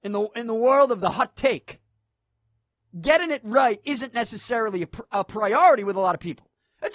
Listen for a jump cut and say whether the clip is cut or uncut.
uncut